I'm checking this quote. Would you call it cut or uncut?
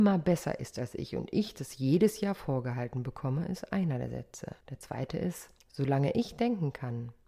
cut